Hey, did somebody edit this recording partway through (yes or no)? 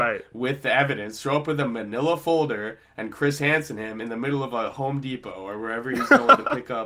no